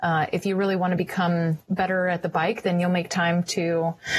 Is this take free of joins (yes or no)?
yes